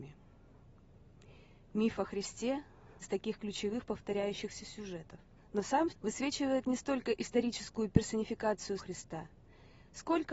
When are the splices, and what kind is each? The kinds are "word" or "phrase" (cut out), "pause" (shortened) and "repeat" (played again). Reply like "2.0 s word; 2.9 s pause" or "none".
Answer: 3.0 s word; 5.4 s pause; 5.9 s word; 8.8 s word